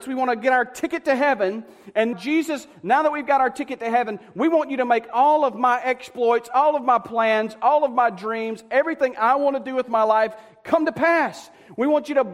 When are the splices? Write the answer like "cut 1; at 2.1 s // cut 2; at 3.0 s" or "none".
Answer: cut 1; at 2.1 s